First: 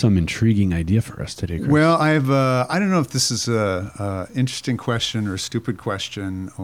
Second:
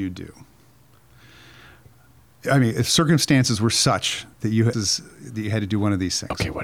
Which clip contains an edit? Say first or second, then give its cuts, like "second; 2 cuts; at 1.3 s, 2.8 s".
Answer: second; 2 cuts; at 4.3 s, 4.7 s